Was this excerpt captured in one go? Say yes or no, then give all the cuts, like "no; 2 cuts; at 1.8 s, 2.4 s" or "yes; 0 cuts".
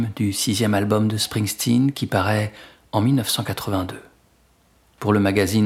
yes; 0 cuts